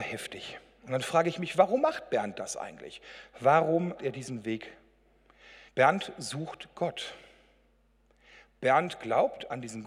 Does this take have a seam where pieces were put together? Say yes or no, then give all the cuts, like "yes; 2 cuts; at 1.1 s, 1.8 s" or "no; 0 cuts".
yes; 2 cuts; at 4.0 s, 5.7 s